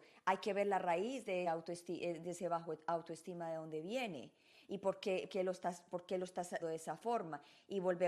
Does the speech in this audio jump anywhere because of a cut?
yes; 3 cuts; at 1.4 s, 5.3 s, 6.6 s

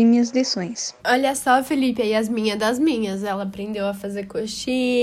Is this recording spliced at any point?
yes; 1 cut; at 1.0 s

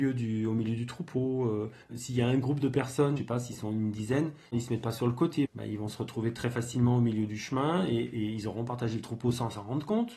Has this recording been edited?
yes; 2 cuts; at 1.8 s, 4.4 s

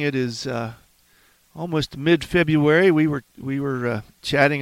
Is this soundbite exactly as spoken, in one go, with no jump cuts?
no; 1 cut; at 3.3 s

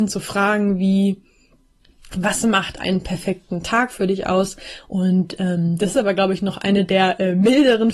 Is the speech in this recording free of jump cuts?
yes; 0 cuts

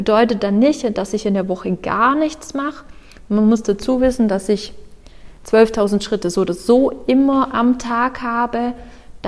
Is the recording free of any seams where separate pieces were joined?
yes; 0 cuts

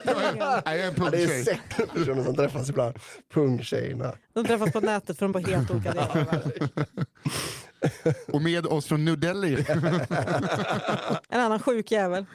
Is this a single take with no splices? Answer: no; 5 cuts; at 1.7 s, 4.2 s, 5.3 s, 9.6 s, 11.2 s

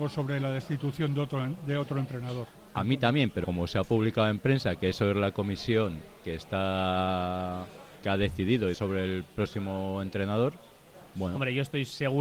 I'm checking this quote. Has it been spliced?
yes; 3 cuts; at 2.7 s, 3.4 s, 8.7 s

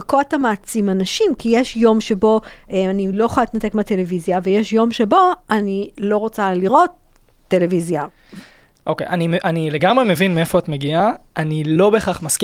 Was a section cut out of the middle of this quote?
no; 0 cuts

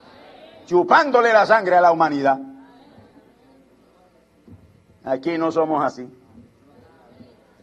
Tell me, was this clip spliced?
no; 0 cuts

